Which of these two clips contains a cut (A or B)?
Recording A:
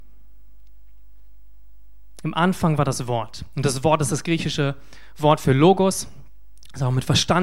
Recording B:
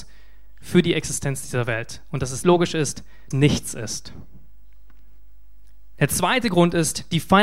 B